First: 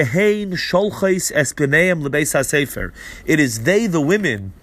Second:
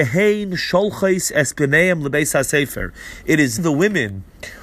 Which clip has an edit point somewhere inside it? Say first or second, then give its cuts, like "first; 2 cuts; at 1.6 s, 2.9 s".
second; 1 cut; at 3.6 s